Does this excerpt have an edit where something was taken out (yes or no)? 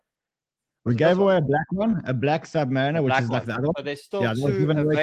no